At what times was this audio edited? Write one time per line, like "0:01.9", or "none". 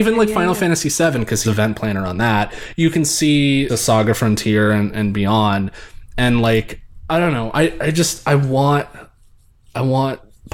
0:01.4
0:03.7